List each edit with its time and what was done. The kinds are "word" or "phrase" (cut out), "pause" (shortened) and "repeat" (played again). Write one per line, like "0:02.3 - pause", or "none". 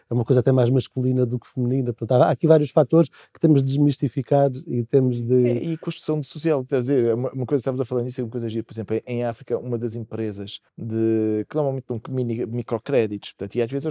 0:10.7 - pause